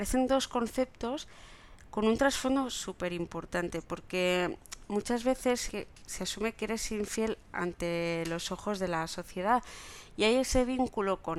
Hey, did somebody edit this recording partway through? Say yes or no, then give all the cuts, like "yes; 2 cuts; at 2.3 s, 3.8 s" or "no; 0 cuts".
no; 0 cuts